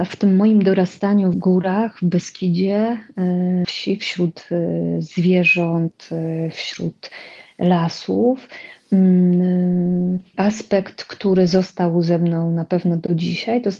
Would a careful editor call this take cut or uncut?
cut